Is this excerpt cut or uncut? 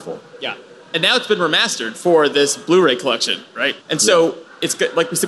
cut